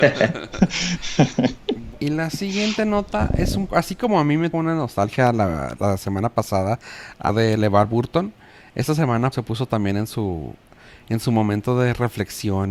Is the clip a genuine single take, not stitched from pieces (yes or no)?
no